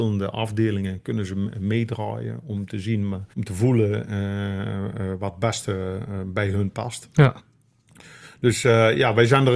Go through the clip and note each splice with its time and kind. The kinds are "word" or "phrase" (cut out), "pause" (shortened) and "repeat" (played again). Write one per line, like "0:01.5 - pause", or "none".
0:03.3 - pause

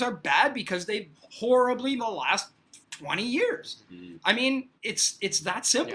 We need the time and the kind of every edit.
0:01.1 - word
0:02.0 - phrase
0:02.8 - pause
0:04.8 - pause

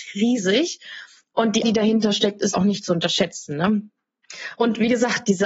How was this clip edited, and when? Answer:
0:01.6 - word
0:02.5 - word

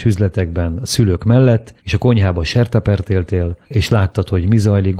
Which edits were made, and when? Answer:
0:01.8 - pause
0:03.6 - pause

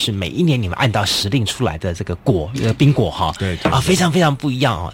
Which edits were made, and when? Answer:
none

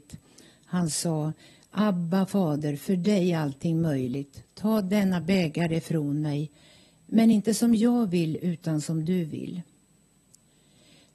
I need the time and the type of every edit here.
none

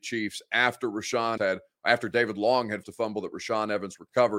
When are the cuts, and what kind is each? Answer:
0:01.4 - word
0:02.8 - word

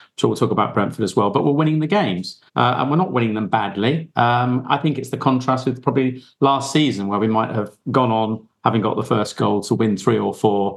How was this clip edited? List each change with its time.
0:02.5 - pause

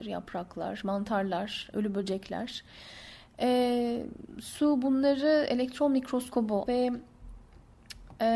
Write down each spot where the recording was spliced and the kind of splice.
0:01.7 - word
0:06.7 - phrase

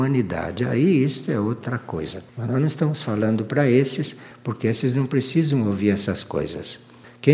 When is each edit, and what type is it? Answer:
0:02.3 - pause

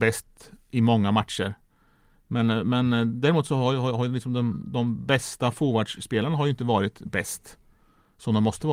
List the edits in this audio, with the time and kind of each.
none

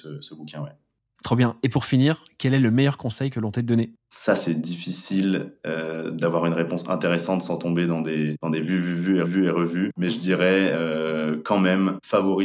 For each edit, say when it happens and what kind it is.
0:09.2 - repeat

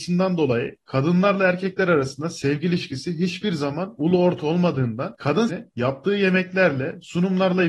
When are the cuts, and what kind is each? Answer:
0:05.5 - word

